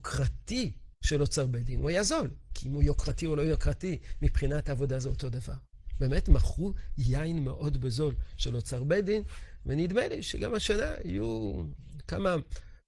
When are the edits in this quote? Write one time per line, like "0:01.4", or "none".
0:00.9